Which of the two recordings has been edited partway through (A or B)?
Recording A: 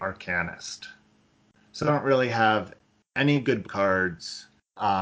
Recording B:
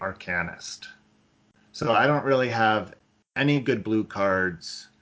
A